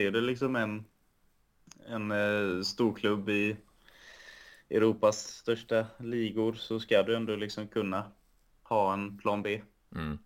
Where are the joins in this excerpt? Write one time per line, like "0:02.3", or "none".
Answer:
none